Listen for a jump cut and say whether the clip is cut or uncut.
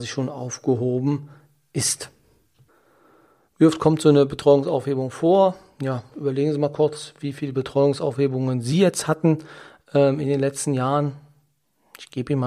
uncut